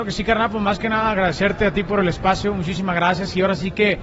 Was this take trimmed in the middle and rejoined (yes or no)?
no